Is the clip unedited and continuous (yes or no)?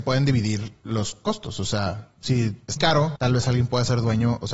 no